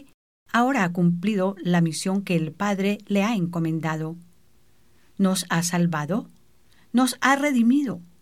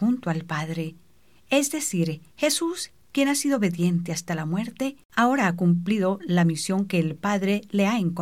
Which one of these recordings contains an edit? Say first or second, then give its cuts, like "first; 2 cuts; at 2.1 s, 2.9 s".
second; 2 cuts; at 2.3 s, 5.1 s